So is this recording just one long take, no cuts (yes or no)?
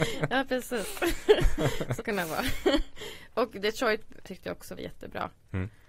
no